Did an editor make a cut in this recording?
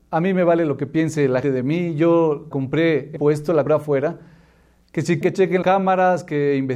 yes; 6 cuts; at 1.4 s, 2.5 s, 3.2 s, 3.7 s, 5.2 s, 5.6 s

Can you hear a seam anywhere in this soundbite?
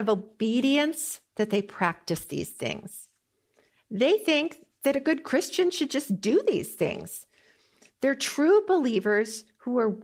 no; 0 cuts

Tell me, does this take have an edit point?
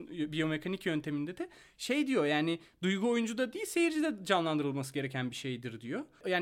no; 0 cuts

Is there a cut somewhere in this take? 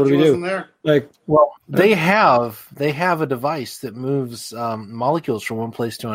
yes; 1 cut; at 1.6 s

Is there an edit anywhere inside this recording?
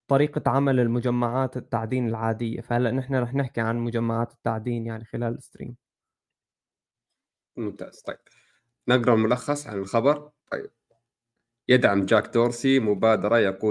yes; 1 cut; at 10.4 s

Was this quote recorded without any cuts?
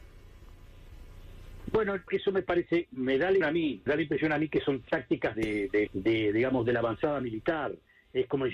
no; 6 cuts; at 2.1 s, 3.4 s, 3.9 s, 4.8 s, 5.3 s, 5.9 s

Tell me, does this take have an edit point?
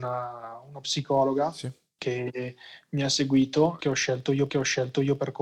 yes; 1 cut; at 4.5 s

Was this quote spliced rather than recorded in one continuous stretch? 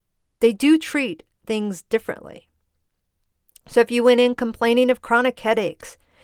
no; 0 cuts

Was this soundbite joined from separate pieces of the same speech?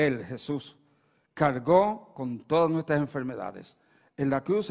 no; 0 cuts

